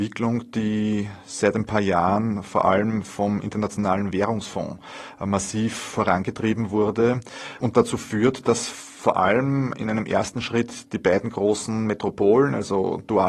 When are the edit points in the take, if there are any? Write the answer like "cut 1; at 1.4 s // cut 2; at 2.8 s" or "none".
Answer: cut 1; at 8.9 s